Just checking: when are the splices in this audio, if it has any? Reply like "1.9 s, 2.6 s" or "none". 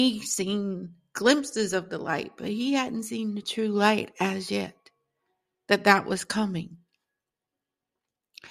none